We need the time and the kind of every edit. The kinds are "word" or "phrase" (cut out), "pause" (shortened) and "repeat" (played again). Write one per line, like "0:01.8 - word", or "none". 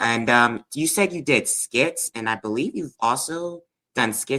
none